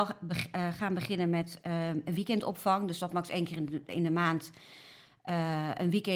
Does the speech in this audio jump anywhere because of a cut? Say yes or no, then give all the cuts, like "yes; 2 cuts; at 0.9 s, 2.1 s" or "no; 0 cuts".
no; 0 cuts